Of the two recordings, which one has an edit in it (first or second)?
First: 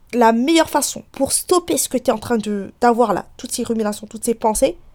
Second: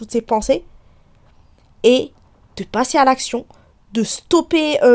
first